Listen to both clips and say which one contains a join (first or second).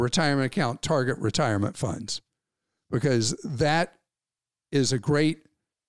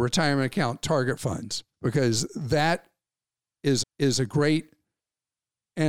second